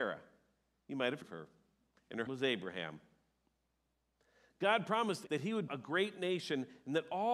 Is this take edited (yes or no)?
yes